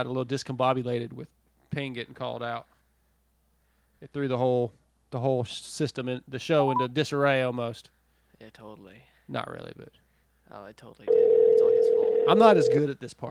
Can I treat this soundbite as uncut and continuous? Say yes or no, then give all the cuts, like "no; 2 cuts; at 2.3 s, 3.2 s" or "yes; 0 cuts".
yes; 0 cuts